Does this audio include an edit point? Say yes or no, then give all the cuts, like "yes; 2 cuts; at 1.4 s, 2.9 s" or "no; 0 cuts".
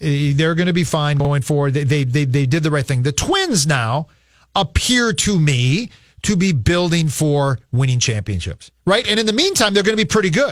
yes; 1 cut; at 8.8 s